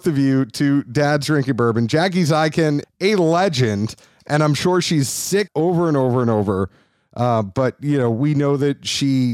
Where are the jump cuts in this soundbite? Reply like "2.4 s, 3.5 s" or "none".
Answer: 2.8 s, 5.5 s

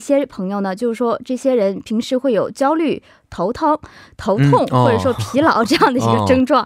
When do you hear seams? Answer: none

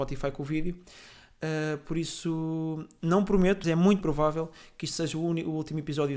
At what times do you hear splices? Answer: 3.6 s, 4.0 s

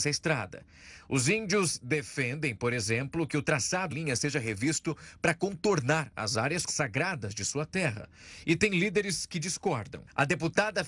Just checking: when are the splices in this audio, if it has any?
3.9 s, 6.7 s

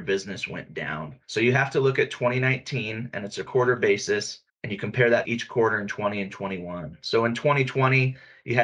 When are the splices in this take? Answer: 1.2 s, 3.5 s, 4.5 s, 5.3 s

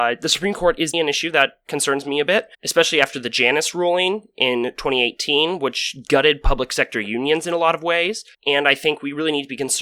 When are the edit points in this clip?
0.9 s, 2.5 s, 8.3 s

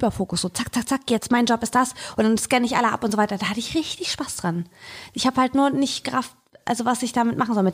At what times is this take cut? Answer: none

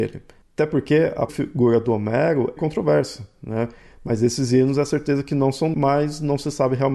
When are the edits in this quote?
1.3 s, 2.6 s, 5.7 s

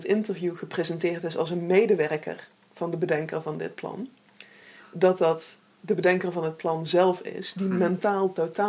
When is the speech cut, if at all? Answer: none

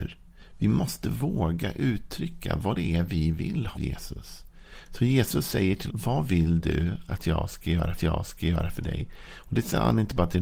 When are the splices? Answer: 3.7 s, 5.9 s, 8.0 s

